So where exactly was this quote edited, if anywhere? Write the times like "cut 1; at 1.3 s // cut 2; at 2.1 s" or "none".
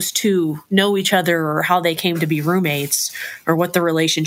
none

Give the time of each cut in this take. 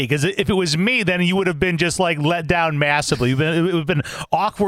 none

